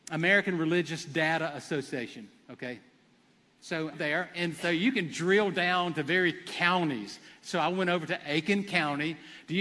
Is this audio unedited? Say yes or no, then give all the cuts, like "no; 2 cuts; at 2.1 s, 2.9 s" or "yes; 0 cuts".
no; 1 cut; at 3.9 s